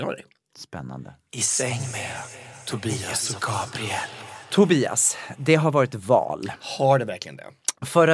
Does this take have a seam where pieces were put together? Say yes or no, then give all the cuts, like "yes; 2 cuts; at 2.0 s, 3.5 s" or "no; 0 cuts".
no; 0 cuts